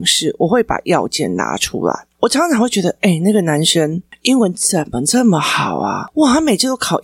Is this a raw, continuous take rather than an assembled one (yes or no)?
yes